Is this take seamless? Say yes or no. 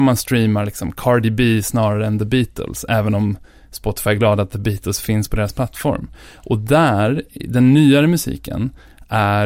yes